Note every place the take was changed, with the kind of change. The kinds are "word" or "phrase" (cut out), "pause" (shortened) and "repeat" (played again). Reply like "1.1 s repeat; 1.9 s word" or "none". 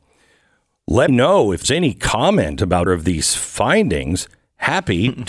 1.1 s word; 1.6 s word; 2.9 s word